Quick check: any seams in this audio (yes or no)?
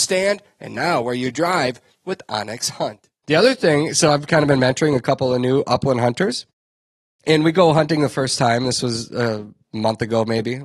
no